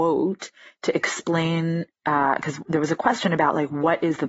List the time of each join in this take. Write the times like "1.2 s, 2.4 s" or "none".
none